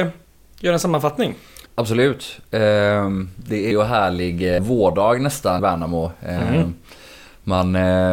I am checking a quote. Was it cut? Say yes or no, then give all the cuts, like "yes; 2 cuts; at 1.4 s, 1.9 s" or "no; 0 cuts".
yes; 4 cuts; at 1.7 s, 3.7 s, 4.6 s, 5.6 s